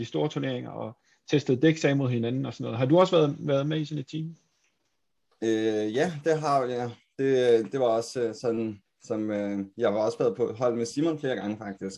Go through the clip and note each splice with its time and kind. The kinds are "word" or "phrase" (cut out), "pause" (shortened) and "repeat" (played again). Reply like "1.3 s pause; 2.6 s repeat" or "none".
none